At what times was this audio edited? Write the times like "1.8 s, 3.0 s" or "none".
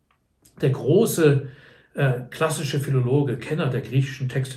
none